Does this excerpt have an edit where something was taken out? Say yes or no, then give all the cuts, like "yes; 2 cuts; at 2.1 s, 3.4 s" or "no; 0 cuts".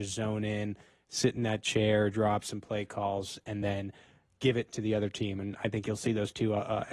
no; 0 cuts